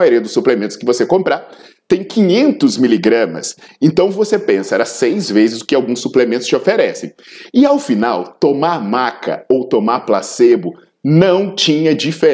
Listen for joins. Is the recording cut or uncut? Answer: uncut